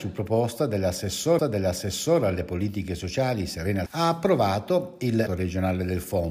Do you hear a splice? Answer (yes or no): yes